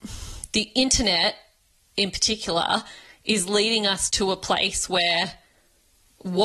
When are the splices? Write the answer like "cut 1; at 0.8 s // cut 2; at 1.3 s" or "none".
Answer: none